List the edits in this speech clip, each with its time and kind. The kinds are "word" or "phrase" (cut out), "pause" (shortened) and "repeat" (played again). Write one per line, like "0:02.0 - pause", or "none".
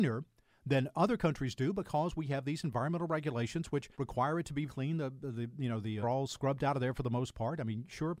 0:03.9 - pause
0:04.7 - word
0:06.0 - phrase

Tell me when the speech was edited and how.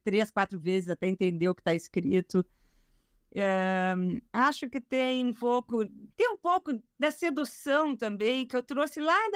0:04.3 - pause
0:06.1 - pause

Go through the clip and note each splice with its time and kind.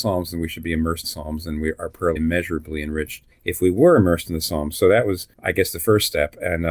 0:01.0 - word
0:02.2 - phrase
0:03.3 - pause
0:05.3 - pause

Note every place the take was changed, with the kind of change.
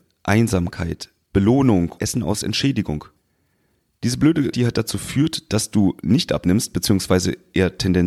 0:02.0 - word
0:04.5 - word

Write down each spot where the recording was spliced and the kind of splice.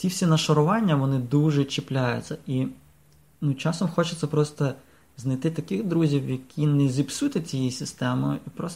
none

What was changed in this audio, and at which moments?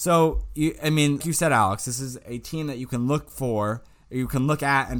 0:01.2 - word

